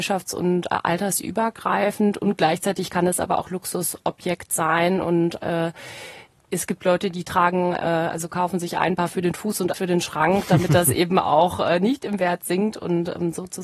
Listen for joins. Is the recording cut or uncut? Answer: cut